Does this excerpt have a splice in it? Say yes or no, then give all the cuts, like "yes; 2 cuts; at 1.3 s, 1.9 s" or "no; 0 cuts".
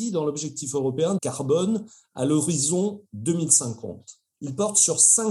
yes; 2 cuts; at 1.2 s, 4.3 s